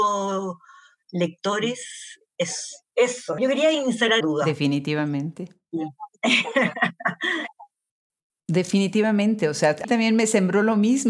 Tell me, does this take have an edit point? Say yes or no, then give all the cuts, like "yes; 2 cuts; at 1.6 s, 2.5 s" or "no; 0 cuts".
yes; 3 cuts; at 3.4 s, 4.2 s, 9.8 s